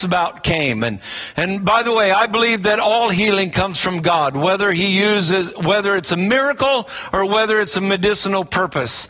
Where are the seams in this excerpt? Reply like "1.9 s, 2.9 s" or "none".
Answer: none

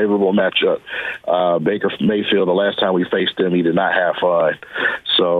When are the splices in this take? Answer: none

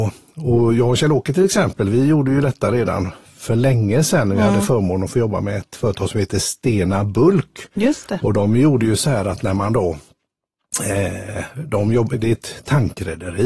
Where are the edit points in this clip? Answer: none

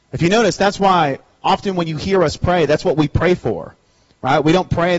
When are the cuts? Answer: none

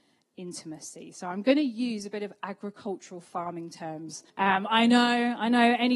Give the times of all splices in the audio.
4.3 s

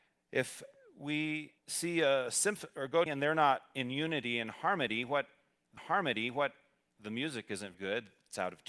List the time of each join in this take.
1.6 s, 3.1 s, 5.8 s, 7.7 s

